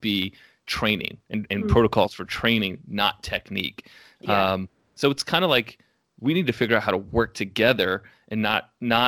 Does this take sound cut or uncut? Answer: uncut